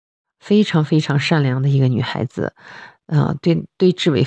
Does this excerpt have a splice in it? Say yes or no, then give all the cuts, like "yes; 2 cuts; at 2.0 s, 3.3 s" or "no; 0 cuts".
no; 0 cuts